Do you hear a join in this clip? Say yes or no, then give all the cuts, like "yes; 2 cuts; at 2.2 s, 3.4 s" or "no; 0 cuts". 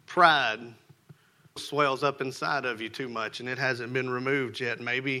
yes; 1 cut; at 1.6 s